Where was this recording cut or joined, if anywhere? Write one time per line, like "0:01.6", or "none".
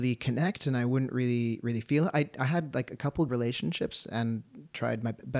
0:03.3

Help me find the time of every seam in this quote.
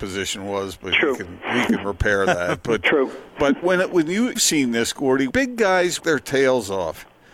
0:03.6
0:04.4
0:05.3
0:06.0

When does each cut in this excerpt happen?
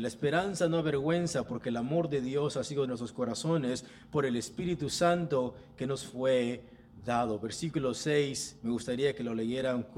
0:02.9

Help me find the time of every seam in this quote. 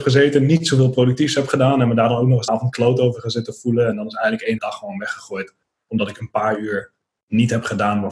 0:02.5
0:04.6

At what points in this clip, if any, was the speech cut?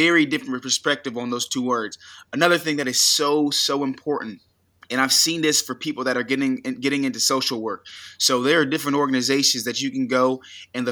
none

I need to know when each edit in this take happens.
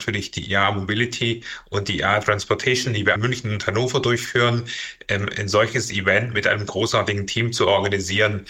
0:03.2

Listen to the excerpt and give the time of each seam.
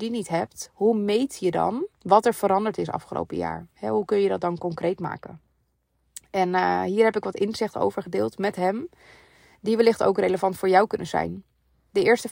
0:01.9

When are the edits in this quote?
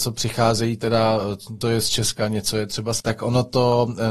0:01.6
0:03.0

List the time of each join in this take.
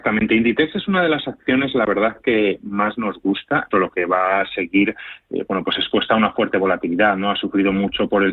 0:03.7

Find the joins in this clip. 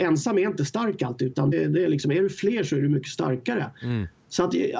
0:01.5

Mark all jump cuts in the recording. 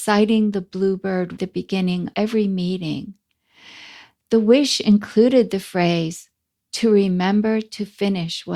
0:01.4
0:02.1

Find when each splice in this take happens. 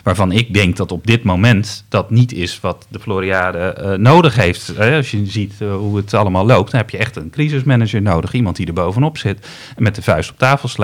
none

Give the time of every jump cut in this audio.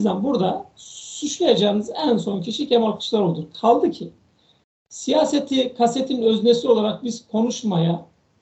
none

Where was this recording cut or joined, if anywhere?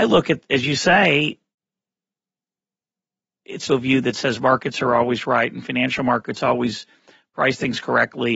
0:03.7

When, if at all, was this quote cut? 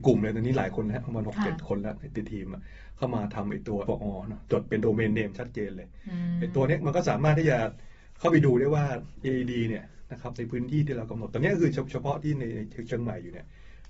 0:03.9

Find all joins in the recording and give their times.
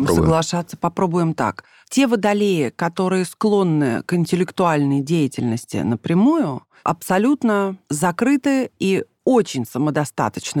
none

